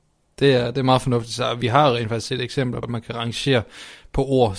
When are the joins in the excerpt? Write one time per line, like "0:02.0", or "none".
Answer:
0:02.8